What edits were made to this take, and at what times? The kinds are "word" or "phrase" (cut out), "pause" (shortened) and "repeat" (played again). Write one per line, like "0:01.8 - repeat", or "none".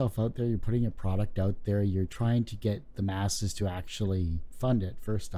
none